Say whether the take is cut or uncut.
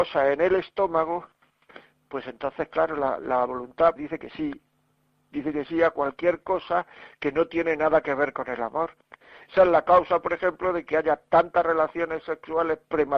cut